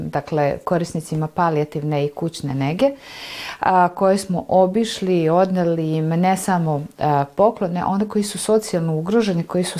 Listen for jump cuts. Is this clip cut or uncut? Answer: uncut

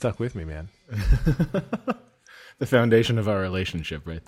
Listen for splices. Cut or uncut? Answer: uncut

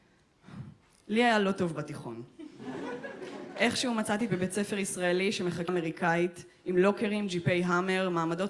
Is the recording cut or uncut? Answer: cut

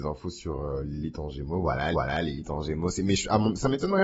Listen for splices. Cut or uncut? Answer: cut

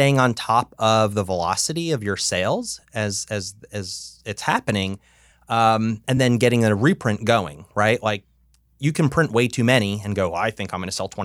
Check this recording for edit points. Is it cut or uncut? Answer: uncut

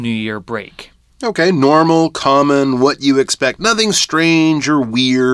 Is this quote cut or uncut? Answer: uncut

